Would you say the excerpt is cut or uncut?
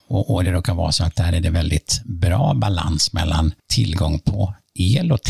cut